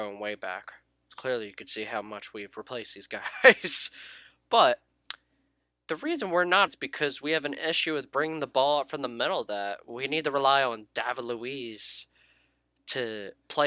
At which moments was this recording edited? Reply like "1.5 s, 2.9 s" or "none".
6.7 s